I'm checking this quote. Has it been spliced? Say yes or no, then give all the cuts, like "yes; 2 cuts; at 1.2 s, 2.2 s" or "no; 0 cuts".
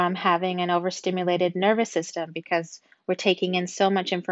no; 0 cuts